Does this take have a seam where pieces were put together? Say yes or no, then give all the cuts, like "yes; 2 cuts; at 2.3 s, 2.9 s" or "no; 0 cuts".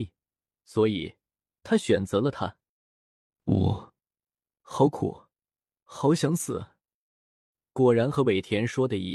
no; 0 cuts